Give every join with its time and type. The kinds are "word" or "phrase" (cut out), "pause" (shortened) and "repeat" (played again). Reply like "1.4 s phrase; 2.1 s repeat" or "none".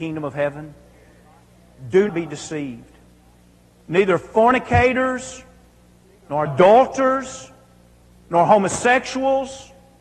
2.1 s word; 6.5 s phrase